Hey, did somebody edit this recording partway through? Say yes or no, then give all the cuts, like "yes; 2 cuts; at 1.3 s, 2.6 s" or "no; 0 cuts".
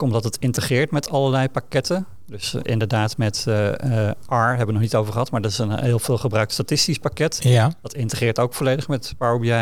yes; 1 cut; at 2.6 s